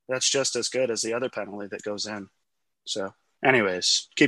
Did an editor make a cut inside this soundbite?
no; 0 cuts

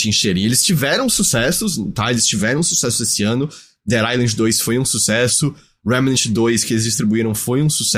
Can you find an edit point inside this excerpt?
no; 0 cuts

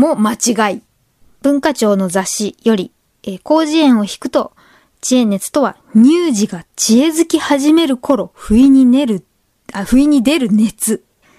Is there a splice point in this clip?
no; 0 cuts

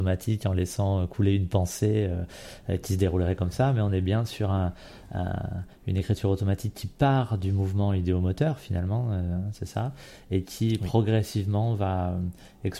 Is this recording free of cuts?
yes; 0 cuts

